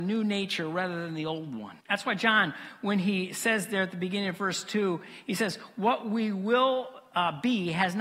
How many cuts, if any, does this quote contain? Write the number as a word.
one